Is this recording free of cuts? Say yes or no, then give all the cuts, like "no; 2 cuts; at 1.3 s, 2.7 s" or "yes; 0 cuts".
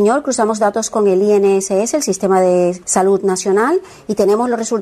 no; 1 cut; at 2.8 s